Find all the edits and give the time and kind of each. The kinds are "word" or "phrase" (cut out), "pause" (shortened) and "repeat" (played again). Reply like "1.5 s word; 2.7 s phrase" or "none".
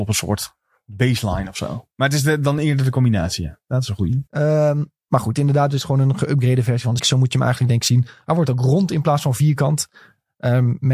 1.9 s pause; 4.3 s pause; 7.0 s word